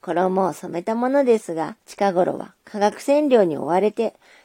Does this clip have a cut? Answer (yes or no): yes